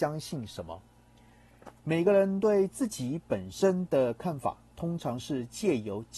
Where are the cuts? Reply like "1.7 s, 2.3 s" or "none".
1.8 s